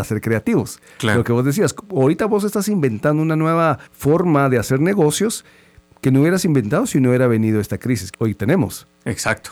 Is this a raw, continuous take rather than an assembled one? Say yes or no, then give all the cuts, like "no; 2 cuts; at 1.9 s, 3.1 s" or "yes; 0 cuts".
no; 2 cuts; at 3.9 s, 8.1 s